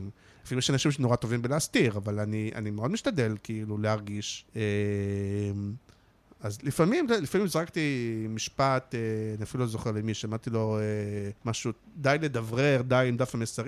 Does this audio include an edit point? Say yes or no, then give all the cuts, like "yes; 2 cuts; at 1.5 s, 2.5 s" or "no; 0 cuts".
yes; 2 cuts; at 4.5 s, 11.4 s